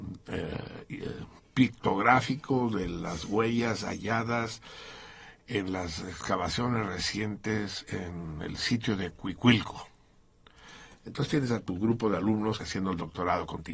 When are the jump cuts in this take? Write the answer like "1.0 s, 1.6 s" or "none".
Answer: 12.6 s